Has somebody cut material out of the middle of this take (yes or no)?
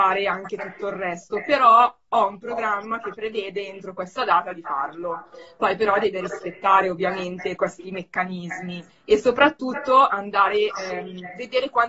yes